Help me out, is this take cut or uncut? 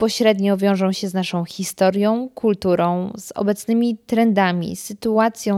uncut